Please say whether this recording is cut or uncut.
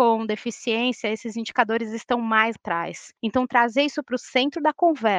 cut